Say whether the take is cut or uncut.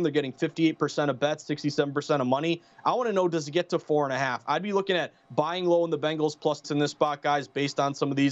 cut